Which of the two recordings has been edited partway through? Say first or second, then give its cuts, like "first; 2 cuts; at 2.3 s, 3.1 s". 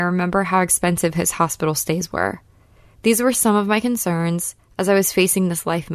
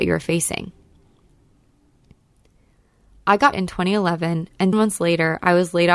second; 2 cuts; at 3.5 s, 4.7 s